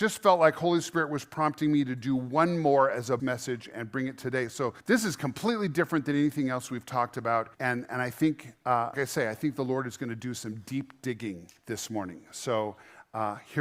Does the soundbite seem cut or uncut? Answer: cut